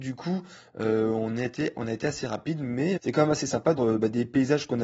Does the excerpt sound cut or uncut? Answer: cut